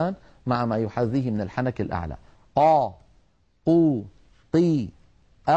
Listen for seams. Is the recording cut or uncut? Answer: uncut